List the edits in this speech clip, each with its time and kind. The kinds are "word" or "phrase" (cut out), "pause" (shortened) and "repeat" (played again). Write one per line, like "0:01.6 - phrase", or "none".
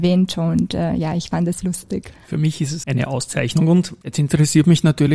0:01.6 - word
0:02.8 - word